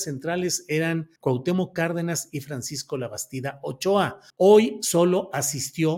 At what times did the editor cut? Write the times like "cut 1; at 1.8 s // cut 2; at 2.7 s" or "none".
cut 1; at 1.2 s // cut 2; at 4.3 s